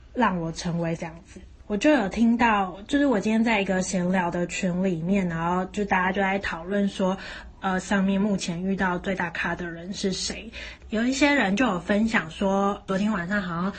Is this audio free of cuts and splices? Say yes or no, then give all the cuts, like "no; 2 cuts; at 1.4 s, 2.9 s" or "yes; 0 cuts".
no; 2 cuts; at 1.0 s, 7.8 s